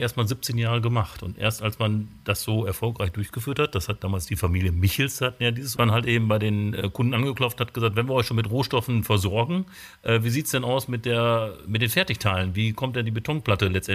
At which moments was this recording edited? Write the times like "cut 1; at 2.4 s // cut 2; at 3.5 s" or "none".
cut 1; at 5.8 s